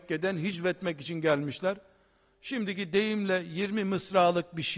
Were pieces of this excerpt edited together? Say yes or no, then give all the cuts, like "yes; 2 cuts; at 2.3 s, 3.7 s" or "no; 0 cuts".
no; 0 cuts